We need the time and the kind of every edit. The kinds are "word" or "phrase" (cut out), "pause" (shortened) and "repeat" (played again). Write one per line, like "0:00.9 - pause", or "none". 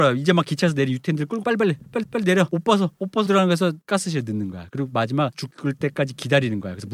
0:01.4 - word
0:02.0 - repeat
0:03.3 - word
0:05.3 - word